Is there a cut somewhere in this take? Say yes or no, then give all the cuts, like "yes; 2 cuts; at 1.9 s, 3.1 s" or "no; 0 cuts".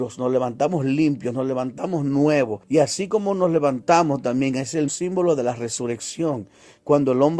yes; 2 cuts; at 2.6 s, 4.9 s